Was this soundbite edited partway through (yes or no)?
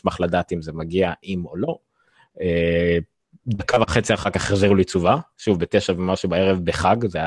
no